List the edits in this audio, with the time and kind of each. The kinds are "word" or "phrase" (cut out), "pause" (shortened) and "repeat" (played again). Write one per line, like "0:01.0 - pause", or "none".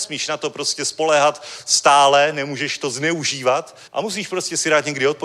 0:03.9 - pause